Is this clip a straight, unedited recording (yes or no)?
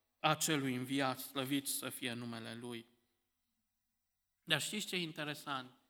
yes